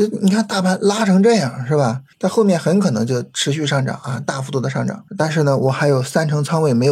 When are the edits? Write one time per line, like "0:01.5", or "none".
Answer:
0:02.1
0:05.1